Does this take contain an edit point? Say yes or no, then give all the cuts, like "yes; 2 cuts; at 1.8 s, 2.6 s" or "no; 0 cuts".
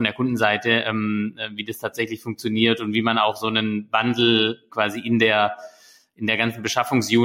yes; 1 cut; at 4.7 s